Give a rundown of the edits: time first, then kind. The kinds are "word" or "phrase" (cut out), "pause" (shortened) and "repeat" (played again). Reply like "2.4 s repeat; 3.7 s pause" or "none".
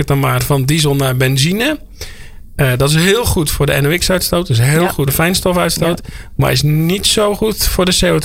5.1 s word